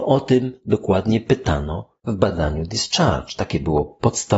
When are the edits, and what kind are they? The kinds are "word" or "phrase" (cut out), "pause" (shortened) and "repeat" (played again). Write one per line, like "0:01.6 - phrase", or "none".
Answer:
0:02.0 - pause